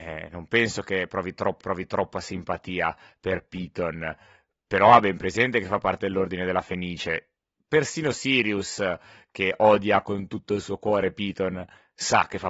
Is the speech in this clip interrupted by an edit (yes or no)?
yes